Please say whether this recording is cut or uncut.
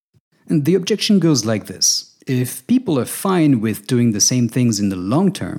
cut